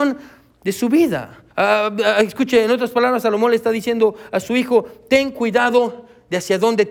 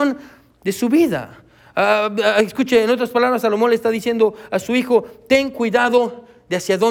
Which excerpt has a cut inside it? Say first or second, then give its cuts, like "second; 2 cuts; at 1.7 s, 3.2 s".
first; 1 cut; at 1.5 s